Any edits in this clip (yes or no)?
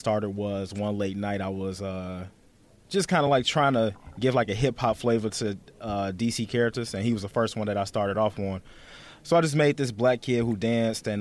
no